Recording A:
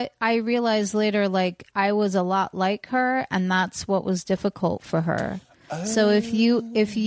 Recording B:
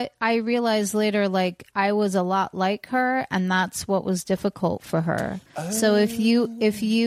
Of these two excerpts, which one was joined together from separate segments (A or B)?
B